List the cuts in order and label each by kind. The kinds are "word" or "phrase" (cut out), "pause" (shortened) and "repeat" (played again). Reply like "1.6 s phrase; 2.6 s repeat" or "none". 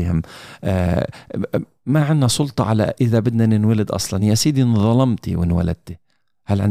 none